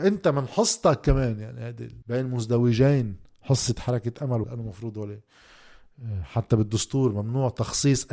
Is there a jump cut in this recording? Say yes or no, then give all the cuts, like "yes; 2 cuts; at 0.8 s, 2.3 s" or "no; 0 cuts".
yes; 2 cuts; at 2.0 s, 4.4 s